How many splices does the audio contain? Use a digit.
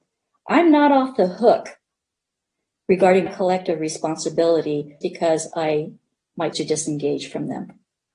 3